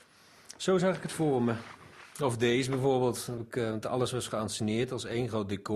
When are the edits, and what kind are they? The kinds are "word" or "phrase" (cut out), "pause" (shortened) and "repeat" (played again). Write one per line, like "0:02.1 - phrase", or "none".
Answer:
0:03.4 - word